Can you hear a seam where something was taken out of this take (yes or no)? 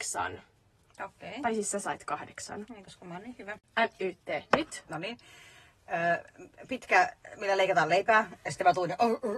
no